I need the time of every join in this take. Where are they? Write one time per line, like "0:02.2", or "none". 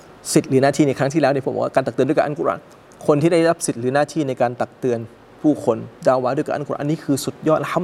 none